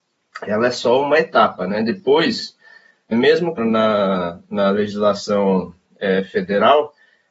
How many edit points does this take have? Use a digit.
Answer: 2